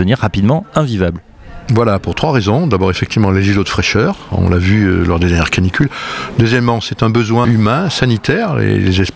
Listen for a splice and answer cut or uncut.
cut